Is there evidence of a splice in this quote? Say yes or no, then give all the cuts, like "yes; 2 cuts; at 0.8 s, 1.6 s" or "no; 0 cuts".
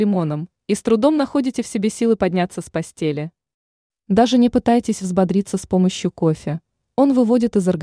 no; 0 cuts